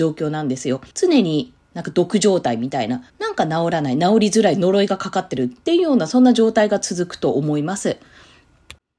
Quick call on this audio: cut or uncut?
cut